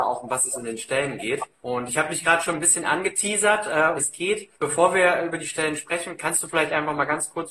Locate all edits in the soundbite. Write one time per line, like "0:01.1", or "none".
0:01.5
0:04.0
0:04.6